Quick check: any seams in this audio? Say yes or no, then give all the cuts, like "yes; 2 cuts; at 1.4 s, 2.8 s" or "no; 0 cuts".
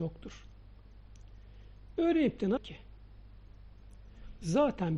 yes; 1 cut; at 2.6 s